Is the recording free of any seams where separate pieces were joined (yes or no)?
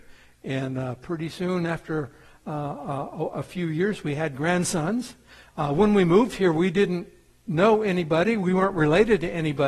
yes